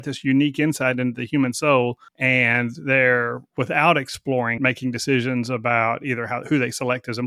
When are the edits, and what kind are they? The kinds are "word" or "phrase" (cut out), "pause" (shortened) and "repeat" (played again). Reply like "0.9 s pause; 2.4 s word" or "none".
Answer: 2.1 s pause; 3.5 s pause; 4.6 s word